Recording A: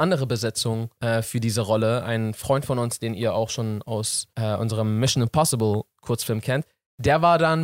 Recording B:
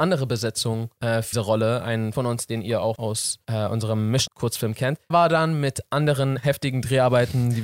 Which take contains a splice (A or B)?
B